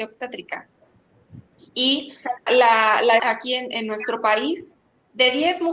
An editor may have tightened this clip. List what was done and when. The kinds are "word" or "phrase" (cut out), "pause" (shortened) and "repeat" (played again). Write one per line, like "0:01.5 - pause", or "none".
0:02.5 - word
0:03.2 - word